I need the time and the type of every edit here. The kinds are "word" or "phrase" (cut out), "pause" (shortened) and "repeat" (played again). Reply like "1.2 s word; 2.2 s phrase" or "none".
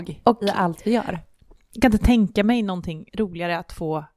none